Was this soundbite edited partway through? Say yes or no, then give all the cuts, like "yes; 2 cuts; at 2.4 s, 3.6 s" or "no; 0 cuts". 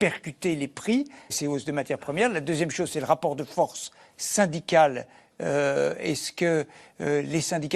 yes; 1 cut; at 1.3 s